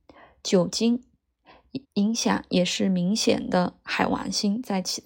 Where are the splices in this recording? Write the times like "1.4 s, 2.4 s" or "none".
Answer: 1.8 s